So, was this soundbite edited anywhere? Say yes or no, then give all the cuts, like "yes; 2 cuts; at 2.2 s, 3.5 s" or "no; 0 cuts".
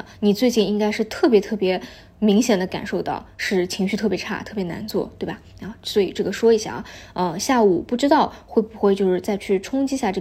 no; 0 cuts